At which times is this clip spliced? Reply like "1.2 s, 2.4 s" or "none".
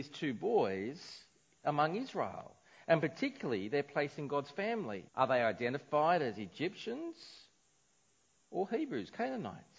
5.1 s